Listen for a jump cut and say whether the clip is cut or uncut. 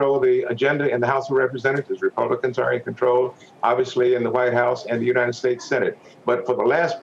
uncut